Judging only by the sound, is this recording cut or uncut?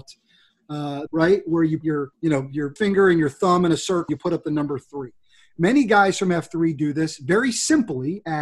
cut